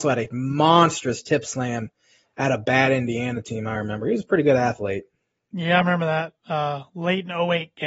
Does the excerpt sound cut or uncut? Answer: uncut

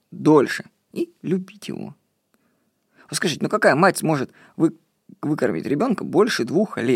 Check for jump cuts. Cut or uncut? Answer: uncut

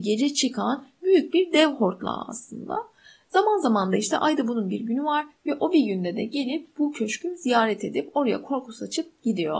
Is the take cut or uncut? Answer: uncut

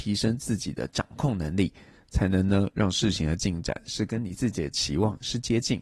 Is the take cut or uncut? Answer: uncut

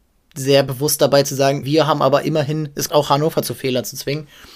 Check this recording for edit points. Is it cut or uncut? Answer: cut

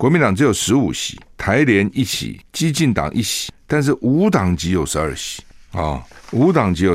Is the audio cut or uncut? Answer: uncut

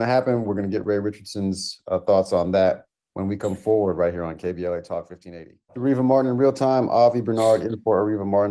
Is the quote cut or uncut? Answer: cut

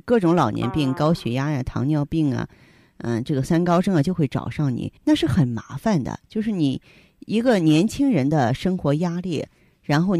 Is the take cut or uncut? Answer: cut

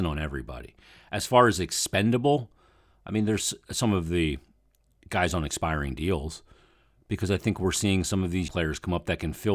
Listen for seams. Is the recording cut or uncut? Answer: cut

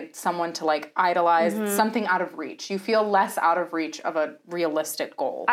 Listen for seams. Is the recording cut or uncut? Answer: uncut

